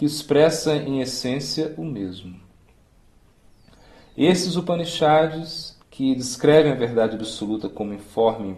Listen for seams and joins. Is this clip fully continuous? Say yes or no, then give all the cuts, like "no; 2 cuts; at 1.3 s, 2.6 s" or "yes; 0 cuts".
no; 1 cut; at 5.8 s